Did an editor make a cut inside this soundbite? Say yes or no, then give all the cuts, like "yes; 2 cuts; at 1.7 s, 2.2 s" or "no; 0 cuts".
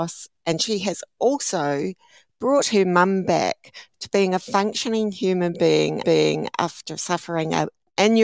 yes; 1 cut; at 6.0 s